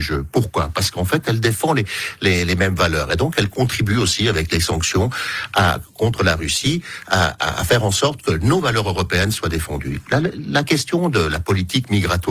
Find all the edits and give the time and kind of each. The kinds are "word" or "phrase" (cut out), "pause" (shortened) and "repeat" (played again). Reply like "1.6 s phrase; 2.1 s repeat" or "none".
none